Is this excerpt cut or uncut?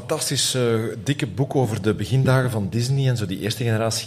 uncut